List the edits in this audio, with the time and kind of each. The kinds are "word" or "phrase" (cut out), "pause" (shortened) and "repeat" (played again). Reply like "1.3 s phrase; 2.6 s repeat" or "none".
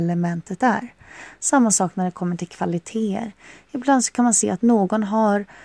none